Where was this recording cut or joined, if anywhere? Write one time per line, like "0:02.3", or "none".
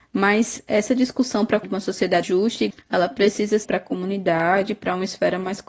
0:01.6
0:02.2
0:02.7
0:03.6